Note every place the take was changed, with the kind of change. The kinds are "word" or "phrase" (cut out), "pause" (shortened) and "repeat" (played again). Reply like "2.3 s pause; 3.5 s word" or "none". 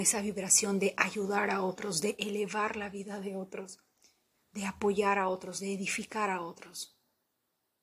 none

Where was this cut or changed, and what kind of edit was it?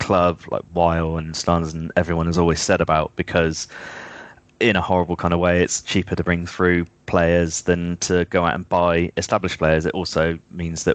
none

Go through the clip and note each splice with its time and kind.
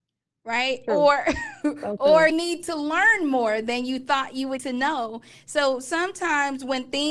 2.3 s word; 4.6 s word

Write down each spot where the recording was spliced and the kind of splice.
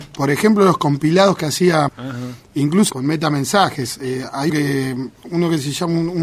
1.9 s word; 2.9 s word; 4.5 s word

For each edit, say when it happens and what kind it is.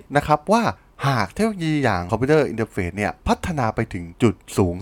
2.1 s word

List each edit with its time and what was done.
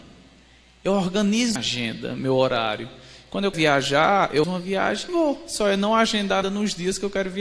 1.6 s word; 3.5 s word; 4.4 s word; 5.1 s word; 6.4 s word

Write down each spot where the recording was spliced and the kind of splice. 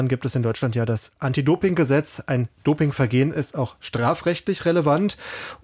2.6 s pause

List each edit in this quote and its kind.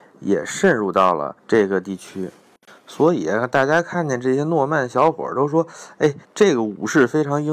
1.4 s pause; 6.2 s pause

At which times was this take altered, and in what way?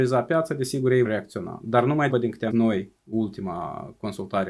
1.0 s word; 2.1 s word; 2.5 s word

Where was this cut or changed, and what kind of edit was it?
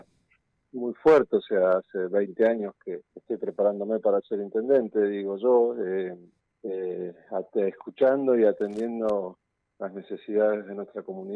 3.1 s pause; 6.4 s pause

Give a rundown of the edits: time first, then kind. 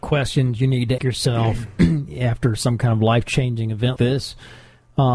1.0 s word; 4.0 s word

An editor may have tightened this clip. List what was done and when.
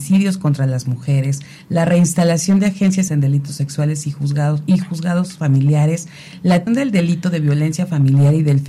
3.1 s word; 6.7 s word

